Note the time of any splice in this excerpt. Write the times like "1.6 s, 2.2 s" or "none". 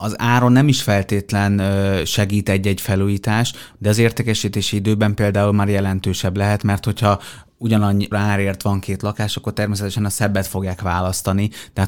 8.1 s